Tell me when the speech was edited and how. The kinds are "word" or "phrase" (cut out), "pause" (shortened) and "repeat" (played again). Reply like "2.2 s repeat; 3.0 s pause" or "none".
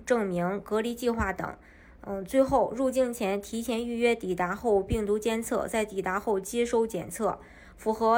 none